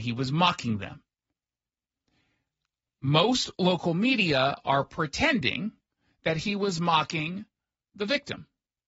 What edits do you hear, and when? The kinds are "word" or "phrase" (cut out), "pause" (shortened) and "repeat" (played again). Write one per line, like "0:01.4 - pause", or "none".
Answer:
none